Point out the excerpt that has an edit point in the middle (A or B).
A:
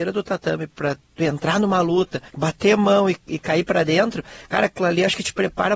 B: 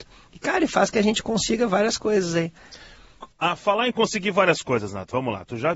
A